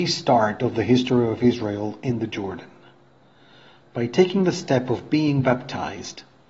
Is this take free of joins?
yes; 0 cuts

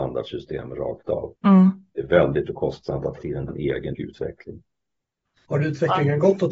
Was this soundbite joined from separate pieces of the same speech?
yes; 4 cuts; at 2.5 s, 3.2 s, 3.5 s, 3.9 s

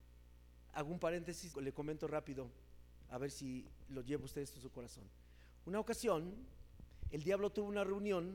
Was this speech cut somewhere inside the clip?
yes; 1 cut; at 1.5 s

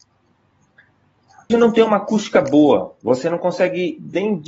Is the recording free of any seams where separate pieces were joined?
no; 1 cut; at 1.5 s

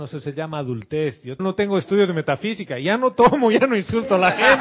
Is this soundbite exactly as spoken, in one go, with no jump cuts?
no; 1 cut; at 1.4 s

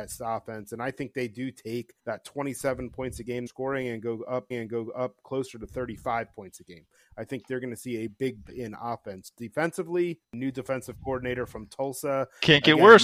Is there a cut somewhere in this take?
yes; 5 cuts; at 2.0 s, 3.5 s, 4.5 s, 8.5 s, 10.2 s

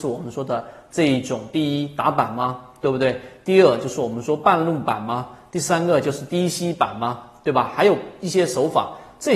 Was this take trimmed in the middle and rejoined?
no; 0 cuts

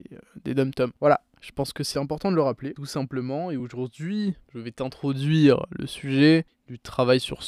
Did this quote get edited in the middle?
no; 0 cuts

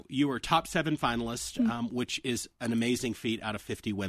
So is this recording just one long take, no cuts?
yes; 0 cuts

